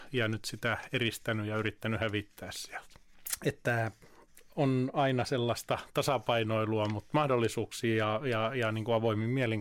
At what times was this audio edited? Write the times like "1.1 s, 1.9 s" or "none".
none